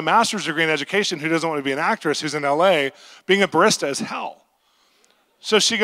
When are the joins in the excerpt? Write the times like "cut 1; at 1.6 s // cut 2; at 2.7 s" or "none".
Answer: none